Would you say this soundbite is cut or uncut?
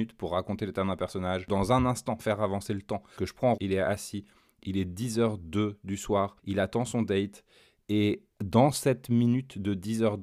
cut